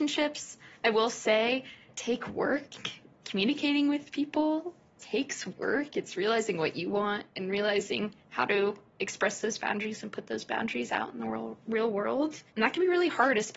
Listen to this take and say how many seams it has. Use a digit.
0